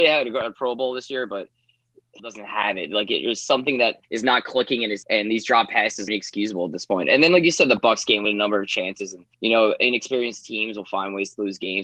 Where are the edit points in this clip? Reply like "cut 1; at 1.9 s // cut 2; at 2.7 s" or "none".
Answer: cut 1; at 2.2 s // cut 2; at 4.0 s // cut 3; at 5.0 s // cut 4; at 6.1 s // cut 5; at 8.2 s // cut 6; at 9.3 s